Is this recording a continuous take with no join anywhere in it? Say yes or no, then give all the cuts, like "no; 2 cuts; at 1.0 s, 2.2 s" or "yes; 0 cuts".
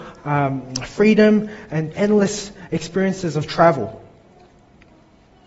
no; 1 cut; at 1.9 s